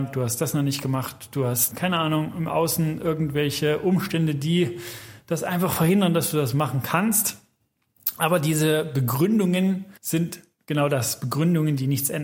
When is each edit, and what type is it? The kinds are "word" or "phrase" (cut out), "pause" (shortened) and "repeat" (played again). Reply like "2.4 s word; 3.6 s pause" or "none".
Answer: 10.0 s pause